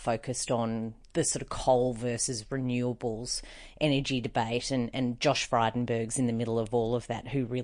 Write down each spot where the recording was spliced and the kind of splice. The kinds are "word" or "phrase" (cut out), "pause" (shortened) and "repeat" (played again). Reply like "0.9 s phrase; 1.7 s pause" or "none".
none